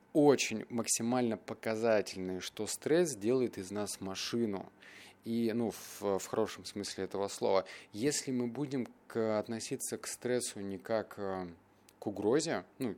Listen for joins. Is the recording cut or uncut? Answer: uncut